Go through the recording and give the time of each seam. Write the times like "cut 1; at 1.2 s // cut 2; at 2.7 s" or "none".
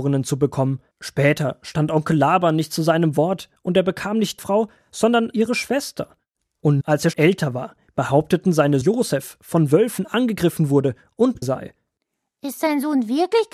cut 1; at 0.9 s // cut 2; at 4.4 s // cut 3; at 6.8 s // cut 4; at 7.1 s // cut 5; at 8.8 s // cut 6; at 11.4 s